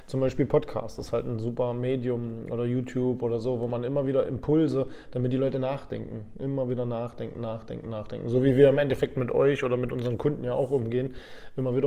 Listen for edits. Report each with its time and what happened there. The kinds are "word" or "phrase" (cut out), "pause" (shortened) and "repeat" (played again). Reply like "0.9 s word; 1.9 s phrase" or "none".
none